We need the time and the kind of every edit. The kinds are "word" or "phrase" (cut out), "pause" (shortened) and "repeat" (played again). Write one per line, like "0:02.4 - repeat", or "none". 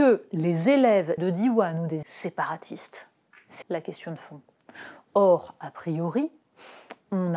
0:01.2 - word
0:02.0 - phrase
0:03.6 - word